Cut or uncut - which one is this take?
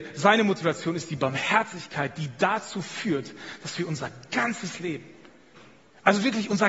uncut